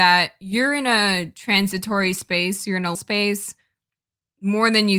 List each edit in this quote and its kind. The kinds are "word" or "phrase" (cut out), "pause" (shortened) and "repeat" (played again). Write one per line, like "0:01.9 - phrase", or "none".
0:02.9 - word